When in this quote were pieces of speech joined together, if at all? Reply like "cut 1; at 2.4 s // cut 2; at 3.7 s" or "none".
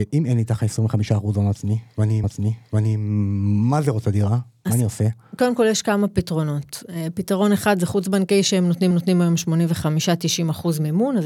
cut 1; at 2.2 s // cut 2; at 4.0 s // cut 3; at 8.9 s